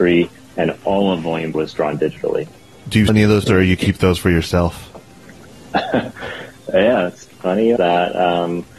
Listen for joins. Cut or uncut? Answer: cut